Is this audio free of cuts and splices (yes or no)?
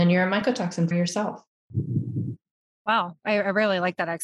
no